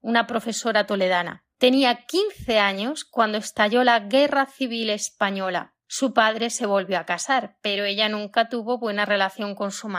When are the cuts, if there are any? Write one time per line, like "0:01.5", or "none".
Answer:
none